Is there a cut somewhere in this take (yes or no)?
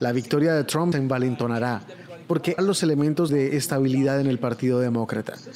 yes